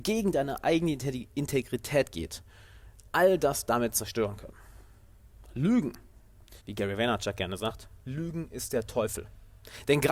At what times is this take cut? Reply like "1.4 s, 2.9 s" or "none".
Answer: 6.6 s